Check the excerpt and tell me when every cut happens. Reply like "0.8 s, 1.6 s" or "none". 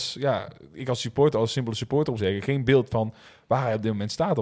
2.2 s